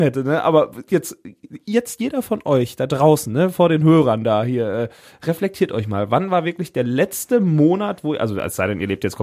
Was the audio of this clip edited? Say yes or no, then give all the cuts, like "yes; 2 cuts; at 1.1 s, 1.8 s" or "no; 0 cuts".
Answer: no; 0 cuts